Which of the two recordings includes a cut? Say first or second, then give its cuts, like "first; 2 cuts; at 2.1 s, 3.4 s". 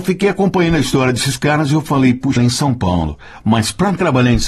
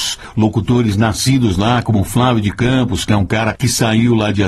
first; 1 cut; at 2.4 s